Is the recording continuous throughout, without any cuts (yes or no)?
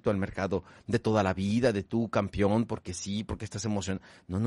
yes